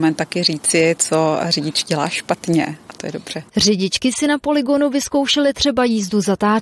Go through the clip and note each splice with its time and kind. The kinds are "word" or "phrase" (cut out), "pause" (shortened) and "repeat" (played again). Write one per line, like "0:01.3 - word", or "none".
0:03.5 - pause